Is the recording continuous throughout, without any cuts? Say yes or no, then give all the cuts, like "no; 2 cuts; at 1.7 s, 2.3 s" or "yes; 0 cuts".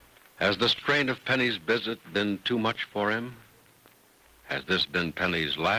yes; 0 cuts